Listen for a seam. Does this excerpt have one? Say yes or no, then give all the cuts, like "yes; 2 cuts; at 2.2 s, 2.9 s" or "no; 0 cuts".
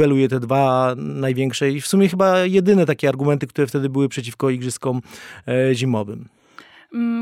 no; 0 cuts